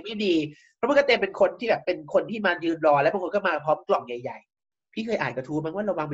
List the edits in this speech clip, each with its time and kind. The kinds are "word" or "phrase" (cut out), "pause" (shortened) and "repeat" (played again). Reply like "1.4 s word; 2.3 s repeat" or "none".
none